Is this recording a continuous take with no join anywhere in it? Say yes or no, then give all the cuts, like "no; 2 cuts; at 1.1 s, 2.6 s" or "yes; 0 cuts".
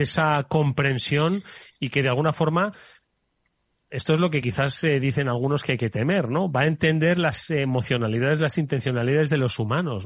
yes; 0 cuts